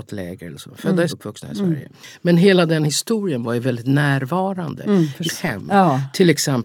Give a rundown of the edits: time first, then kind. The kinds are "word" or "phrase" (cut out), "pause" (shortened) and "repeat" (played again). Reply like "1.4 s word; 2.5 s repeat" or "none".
1.1 s word; 5.3 s word